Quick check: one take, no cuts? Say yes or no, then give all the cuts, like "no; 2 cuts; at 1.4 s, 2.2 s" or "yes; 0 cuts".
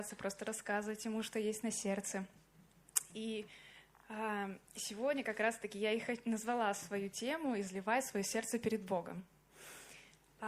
no; 1 cut; at 4.6 s